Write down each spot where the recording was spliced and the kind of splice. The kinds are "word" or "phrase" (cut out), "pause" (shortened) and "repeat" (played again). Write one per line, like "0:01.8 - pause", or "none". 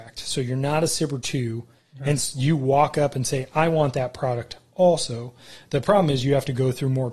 none